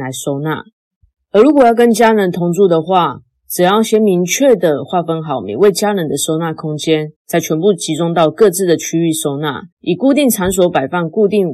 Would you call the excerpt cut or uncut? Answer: cut